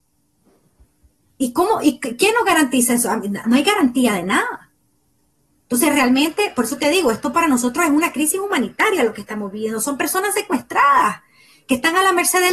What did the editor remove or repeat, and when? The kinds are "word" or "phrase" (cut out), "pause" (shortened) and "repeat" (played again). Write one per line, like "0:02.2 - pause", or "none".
0:03.4 - word